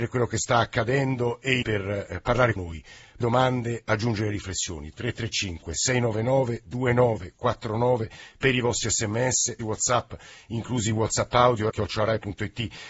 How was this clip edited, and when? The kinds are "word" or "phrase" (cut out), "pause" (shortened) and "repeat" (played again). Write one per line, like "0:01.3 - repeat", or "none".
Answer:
0:01.6 - word
0:02.6 - word
0:03.2 - word
0:09.6 - phrase
0:11.7 - phrase